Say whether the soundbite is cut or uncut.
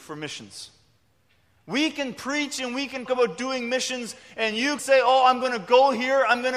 cut